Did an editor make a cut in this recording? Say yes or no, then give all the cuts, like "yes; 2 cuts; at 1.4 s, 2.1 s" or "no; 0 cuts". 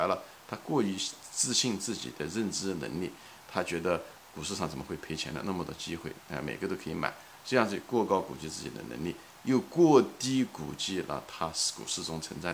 no; 0 cuts